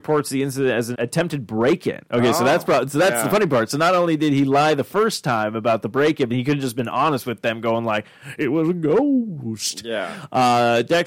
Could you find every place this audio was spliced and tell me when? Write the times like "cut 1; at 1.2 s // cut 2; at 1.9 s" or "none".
cut 1; at 0.9 s // cut 2; at 2.1 s // cut 3; at 6.3 s

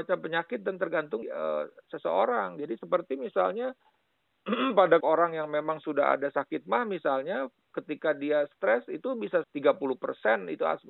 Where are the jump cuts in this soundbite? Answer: cut 1; at 1.2 s // cut 2; at 5.0 s // cut 3; at 7.7 s // cut 4; at 9.4 s

